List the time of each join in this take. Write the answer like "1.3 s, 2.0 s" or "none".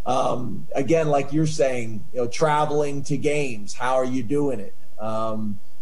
none